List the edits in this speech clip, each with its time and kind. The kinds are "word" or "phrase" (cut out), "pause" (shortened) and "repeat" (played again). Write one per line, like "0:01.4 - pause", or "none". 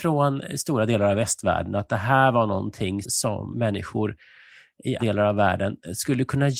0:03.0 - word
0:03.5 - word
0:05.0 - word

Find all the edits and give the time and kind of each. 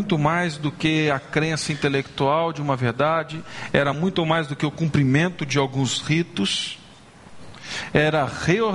none

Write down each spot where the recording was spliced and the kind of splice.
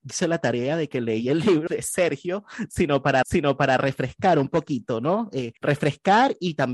0:01.7 - word
0:03.2 - repeat
0:05.6 - pause

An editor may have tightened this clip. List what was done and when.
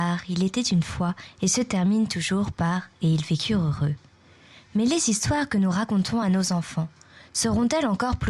none

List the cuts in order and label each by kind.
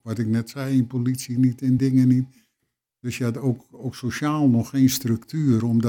none

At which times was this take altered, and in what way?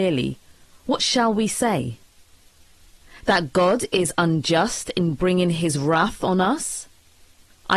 none

